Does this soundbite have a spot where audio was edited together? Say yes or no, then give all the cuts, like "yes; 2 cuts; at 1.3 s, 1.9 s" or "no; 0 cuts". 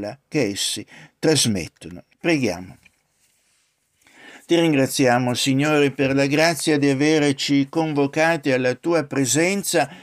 yes; 1 cut; at 2.1 s